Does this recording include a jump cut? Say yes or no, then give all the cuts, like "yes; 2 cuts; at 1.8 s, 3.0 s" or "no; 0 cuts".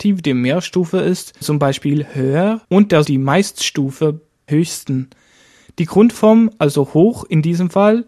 yes; 4 cuts; at 1.4 s, 2.6 s, 3.1 s, 4.5 s